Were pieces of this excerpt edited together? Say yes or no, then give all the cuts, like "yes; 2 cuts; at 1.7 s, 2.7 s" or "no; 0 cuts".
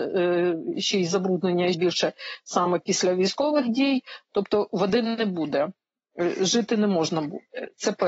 yes; 1 cut; at 1.7 s